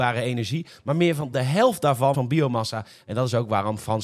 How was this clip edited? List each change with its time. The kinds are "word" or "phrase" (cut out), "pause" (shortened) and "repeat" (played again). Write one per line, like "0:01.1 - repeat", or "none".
0:01.3 - word
0:02.1 - word